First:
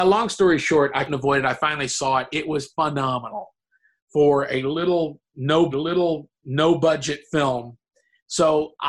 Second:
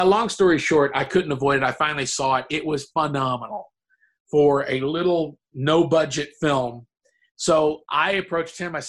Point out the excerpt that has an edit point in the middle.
first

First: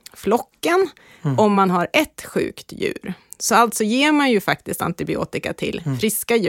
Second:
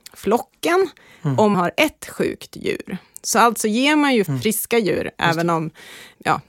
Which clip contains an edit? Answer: second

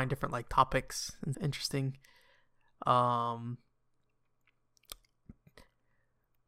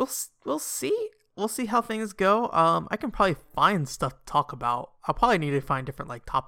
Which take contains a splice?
first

